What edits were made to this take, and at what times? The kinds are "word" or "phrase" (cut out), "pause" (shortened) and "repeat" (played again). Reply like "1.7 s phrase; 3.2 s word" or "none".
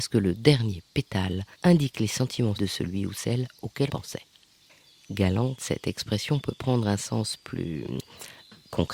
1.5 s pause; 2.5 s word; 3.9 s word